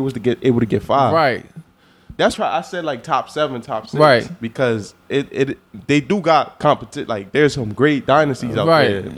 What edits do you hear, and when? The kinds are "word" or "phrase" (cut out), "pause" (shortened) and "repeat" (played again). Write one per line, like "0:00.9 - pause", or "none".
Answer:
0:02.3 - phrase